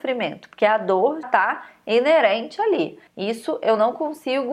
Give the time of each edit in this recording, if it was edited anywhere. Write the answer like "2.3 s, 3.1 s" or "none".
1.2 s, 3.1 s